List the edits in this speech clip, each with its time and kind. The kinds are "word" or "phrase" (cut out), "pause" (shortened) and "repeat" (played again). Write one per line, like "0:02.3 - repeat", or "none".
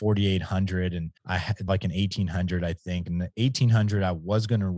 0:01.2 - pause
0:01.7 - word